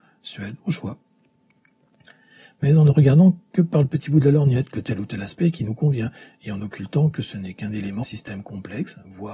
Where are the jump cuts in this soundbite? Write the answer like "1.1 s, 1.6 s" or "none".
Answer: 8.0 s